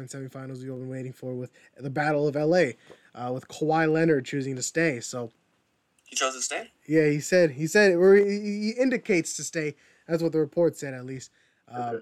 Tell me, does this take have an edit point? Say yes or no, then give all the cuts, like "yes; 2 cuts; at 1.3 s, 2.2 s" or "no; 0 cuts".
no; 0 cuts